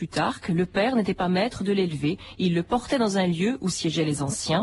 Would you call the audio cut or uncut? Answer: uncut